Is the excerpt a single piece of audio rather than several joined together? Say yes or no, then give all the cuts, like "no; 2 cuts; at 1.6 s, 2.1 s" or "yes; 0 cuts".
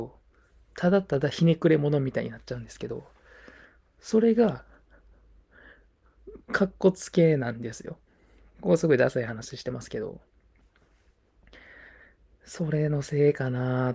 no; 1 cut; at 6.4 s